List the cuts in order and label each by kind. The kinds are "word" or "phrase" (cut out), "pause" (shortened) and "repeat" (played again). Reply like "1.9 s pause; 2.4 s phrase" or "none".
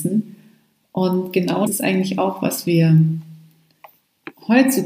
1.7 s phrase